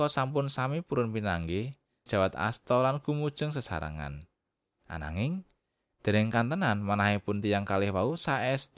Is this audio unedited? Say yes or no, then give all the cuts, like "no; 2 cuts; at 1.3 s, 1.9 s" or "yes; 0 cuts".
no; 1 cut; at 2.1 s